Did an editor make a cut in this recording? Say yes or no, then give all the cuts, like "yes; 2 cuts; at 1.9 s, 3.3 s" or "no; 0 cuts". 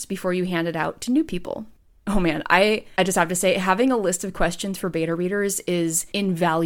no; 0 cuts